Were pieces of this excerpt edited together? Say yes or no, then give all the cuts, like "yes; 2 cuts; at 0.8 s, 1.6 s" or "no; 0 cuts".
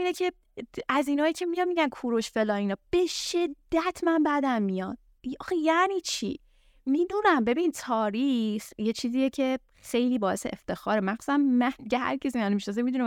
no; 0 cuts